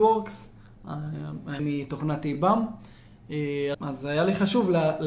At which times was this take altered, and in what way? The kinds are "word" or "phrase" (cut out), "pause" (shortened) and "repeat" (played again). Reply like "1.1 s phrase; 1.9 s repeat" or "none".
1.6 s word; 3.7 s word